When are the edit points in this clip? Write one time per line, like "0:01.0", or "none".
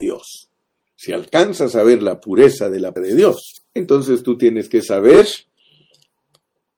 0:03.0
0:03.6